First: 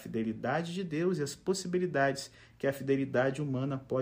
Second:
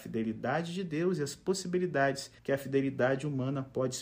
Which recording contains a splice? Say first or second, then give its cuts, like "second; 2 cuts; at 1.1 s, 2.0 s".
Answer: second; 1 cut; at 2.4 s